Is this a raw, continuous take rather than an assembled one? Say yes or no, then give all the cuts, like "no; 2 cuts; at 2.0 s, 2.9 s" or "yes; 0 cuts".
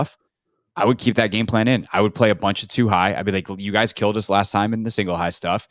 yes; 0 cuts